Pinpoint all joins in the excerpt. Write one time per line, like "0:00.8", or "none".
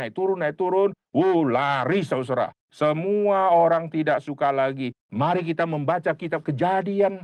0:02.6